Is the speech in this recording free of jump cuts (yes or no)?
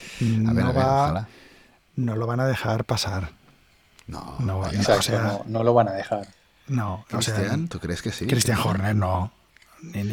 yes